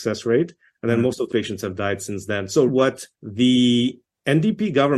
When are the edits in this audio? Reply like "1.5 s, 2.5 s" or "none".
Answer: 1.3 s, 2.7 s, 3.1 s